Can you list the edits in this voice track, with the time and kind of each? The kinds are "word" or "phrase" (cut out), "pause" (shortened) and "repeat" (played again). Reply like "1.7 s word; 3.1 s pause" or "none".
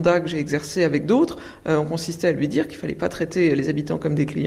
none